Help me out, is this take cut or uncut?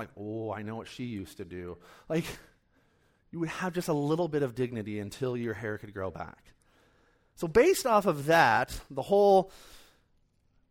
uncut